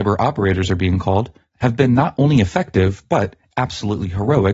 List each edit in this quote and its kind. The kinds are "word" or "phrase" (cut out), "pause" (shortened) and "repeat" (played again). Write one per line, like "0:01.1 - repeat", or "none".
none